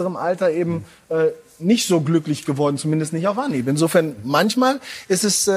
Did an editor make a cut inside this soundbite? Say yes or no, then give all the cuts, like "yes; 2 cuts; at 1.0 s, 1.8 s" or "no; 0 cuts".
no; 0 cuts